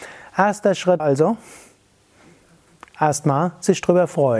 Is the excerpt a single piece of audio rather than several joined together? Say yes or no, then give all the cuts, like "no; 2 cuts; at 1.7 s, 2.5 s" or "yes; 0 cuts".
no; 1 cut; at 1.0 s